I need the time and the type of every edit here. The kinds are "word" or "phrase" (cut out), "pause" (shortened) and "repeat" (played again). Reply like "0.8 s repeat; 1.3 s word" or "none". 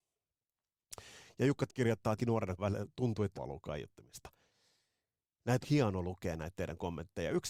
1.7 s word; 2.2 s word; 2.6 s word; 3.3 s word; 5.6 s word